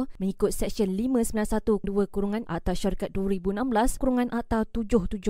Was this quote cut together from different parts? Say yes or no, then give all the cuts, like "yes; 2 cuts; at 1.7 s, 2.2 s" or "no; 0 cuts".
yes; 3 cuts; at 1.8 s, 2.5 s, 4.0 s